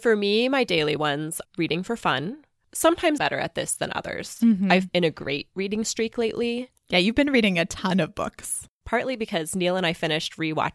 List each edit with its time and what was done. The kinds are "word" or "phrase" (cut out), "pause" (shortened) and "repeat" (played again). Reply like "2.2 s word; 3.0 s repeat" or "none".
1.4 s word; 3.2 s word; 4.9 s word